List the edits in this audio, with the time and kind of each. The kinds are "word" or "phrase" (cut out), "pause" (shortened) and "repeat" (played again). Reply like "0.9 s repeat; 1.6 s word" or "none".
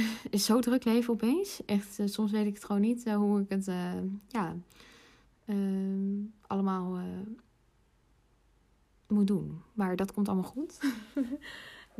none